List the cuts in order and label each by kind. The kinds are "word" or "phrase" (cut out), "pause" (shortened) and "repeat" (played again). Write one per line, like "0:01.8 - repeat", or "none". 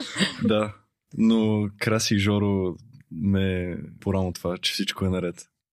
0:04.0 - word
0:04.3 - word